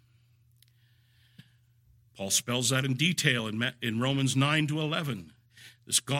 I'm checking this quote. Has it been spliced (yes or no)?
yes